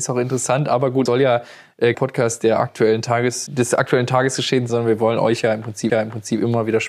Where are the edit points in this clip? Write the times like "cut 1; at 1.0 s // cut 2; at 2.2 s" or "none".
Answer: cut 1; at 1.1 s // cut 2; at 1.9 s // cut 3; at 3.5 s // cut 4; at 4.7 s // cut 5; at 5.9 s